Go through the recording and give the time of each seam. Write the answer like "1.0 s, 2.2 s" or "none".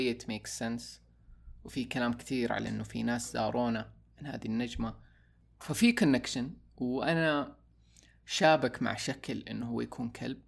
none